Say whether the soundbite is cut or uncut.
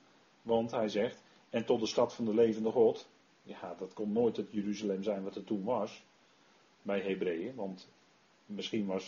uncut